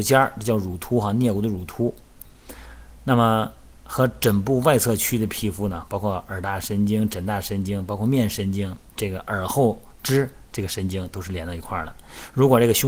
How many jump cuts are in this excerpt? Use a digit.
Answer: 1